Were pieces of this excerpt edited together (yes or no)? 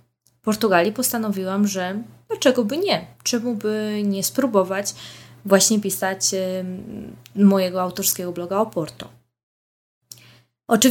no